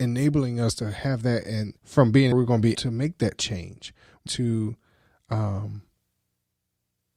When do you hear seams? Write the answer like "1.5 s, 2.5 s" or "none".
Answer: 1.8 s, 2.3 s, 2.7 s, 4.3 s